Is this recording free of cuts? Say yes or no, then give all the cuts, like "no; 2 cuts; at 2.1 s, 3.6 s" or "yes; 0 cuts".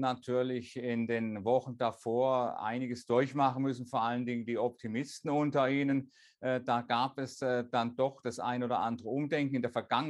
yes; 0 cuts